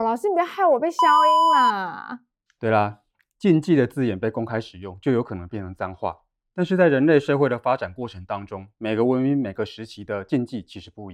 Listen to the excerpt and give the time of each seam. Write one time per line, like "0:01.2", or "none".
none